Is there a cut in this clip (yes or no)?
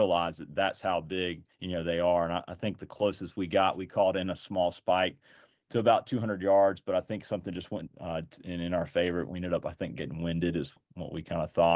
yes